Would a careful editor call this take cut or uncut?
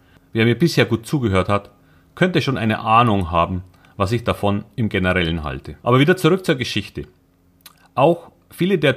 cut